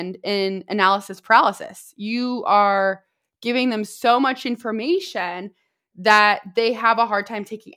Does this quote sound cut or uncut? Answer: uncut